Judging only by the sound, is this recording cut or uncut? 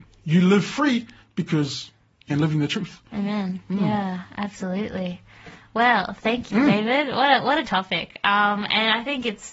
cut